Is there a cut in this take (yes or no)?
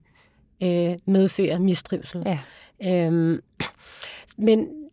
no